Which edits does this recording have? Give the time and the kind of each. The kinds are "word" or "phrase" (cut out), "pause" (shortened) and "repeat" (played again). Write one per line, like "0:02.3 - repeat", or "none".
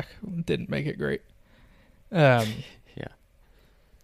none